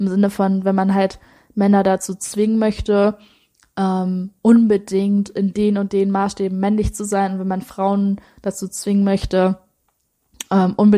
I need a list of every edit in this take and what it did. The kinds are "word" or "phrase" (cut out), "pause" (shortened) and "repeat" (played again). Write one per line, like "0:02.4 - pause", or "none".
none